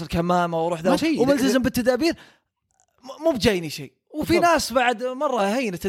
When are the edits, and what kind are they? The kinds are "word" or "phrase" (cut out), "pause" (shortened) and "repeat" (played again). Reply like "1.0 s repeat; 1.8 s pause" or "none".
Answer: 1.0 s word